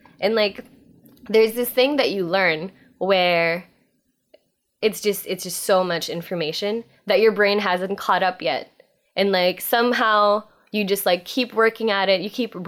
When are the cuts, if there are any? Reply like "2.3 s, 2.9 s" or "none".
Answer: none